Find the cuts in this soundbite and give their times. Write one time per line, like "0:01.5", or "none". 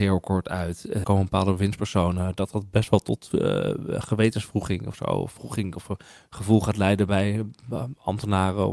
0:01.0

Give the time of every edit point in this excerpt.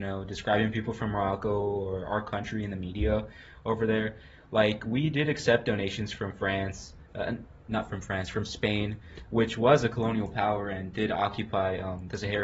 none

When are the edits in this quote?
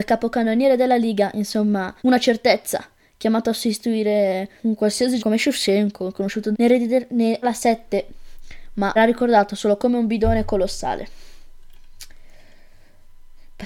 0:02.0
0:04.6
0:05.2
0:06.5
0:07.4
0:09.0

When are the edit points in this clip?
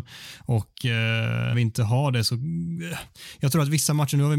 0:01.5

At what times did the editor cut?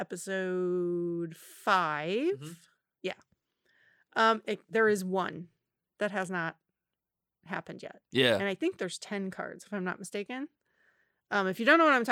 none

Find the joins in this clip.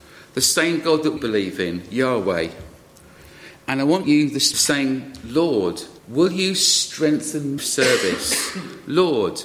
0:01.2
0:04.0
0:04.5
0:06.0
0:07.6

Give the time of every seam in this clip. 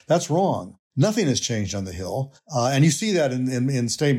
none

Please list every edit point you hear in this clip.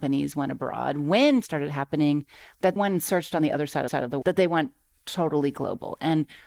0:01.4
0:02.8
0:03.9
0:04.2

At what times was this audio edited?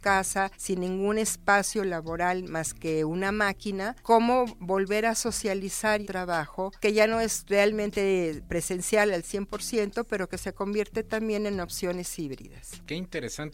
0:06.0

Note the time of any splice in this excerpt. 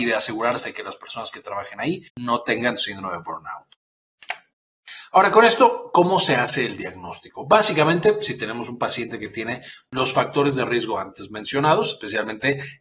0:02.1

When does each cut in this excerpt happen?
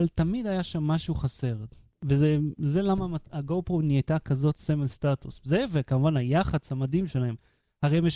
none

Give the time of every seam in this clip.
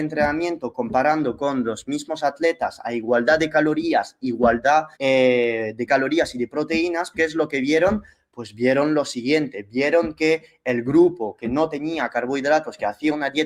0:04.9
0:07.1

